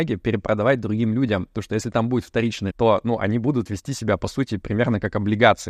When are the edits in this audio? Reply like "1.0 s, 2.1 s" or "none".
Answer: 2.7 s

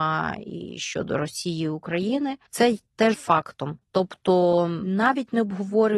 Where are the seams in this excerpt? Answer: 2.5 s, 3.1 s

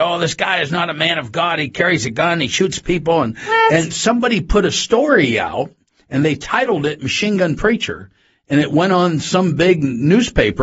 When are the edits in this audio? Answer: none

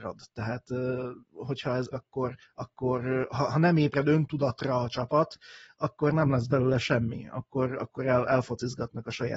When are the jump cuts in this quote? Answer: 1.2 s, 1.9 s, 2.4 s

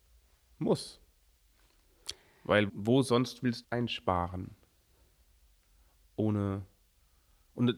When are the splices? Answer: 2.7 s, 3.6 s

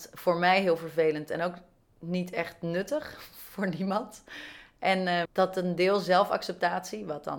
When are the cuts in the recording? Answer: 5.2 s

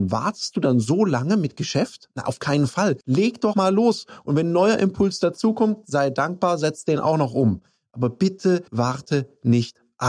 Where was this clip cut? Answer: 3.0 s, 3.5 s, 8.7 s

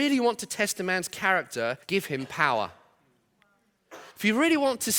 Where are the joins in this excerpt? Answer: 1.8 s, 4.1 s

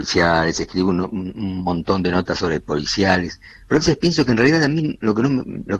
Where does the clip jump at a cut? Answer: none

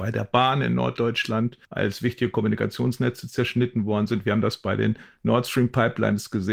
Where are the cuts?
1.6 s

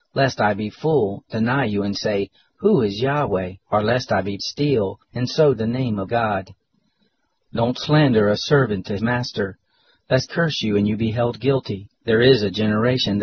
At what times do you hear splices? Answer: 3.6 s, 4.4 s, 5.0 s, 5.6 s, 6.1 s, 9.0 s, 10.3 s, 12.0 s

